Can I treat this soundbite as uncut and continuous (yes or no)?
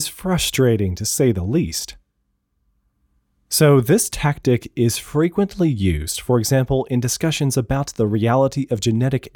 yes